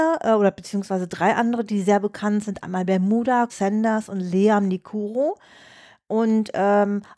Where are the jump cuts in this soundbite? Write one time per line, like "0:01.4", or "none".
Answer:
0:03.5